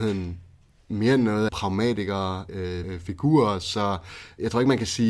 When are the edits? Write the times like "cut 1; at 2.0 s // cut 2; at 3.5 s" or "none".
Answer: cut 1; at 1.5 s // cut 2; at 2.8 s

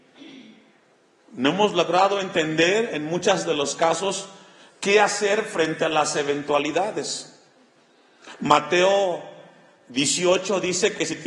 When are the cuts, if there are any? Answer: none

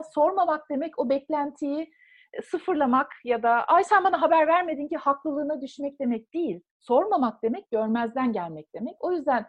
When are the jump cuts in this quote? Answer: cut 1; at 6.7 s

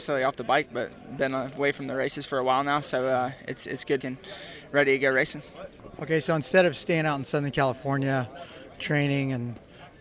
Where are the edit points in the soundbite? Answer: cut 1; at 4.0 s

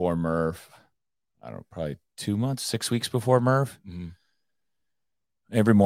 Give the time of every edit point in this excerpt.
none

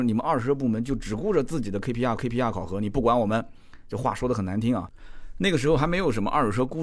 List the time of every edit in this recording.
cut 1; at 2.2 s

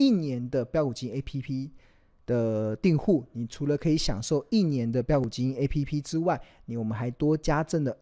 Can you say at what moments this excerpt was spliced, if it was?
none

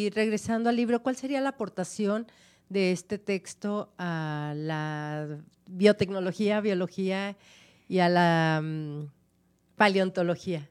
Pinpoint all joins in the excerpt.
none

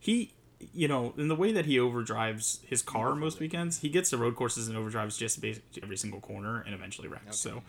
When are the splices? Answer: cut 1; at 5.8 s

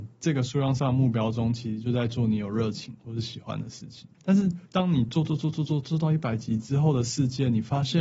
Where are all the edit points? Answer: cut 1; at 4.1 s // cut 2; at 4.7 s

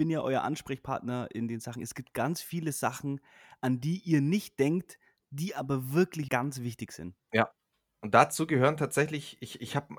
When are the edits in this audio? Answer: cut 1; at 6.3 s

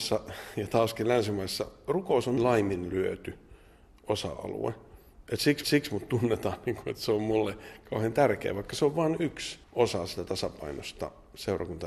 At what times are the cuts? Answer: cut 1; at 2.4 s // cut 2; at 5.6 s // cut 3; at 9.6 s

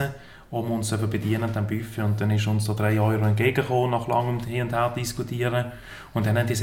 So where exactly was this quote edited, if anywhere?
none

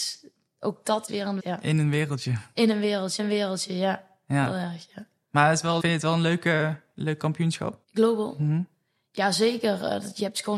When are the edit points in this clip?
cut 1; at 1.1 s // cut 2; at 1.4 s // cut 3; at 3.2 s // cut 4; at 5.8 s // cut 5; at 7.8 s

